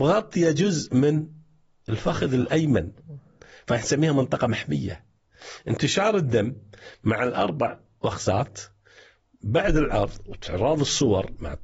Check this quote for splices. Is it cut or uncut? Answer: uncut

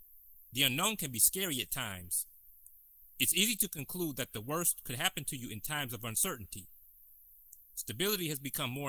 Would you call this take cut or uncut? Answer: uncut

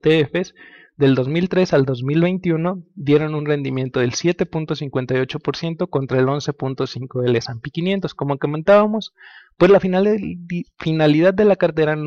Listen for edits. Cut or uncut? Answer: uncut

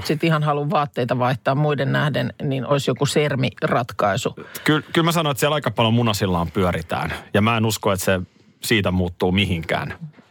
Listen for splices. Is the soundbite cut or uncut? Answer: uncut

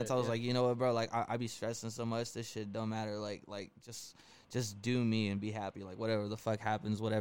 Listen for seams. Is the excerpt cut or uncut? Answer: uncut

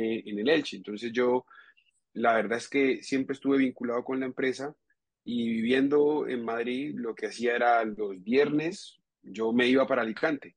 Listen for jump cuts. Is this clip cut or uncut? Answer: uncut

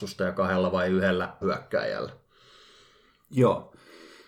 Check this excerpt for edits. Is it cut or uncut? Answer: cut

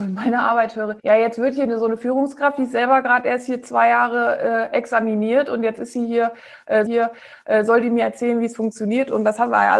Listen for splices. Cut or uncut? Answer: cut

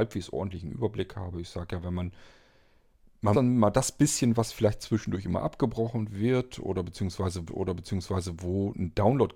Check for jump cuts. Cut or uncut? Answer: cut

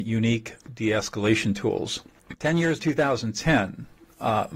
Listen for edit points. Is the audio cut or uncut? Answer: cut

